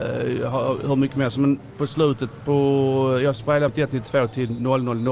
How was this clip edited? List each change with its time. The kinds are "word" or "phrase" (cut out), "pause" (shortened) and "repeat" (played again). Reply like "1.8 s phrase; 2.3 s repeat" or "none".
3.7 s word